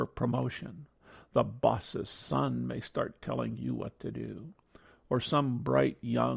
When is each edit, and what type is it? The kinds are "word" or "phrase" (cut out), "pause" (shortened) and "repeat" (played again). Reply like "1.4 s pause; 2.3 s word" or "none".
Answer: none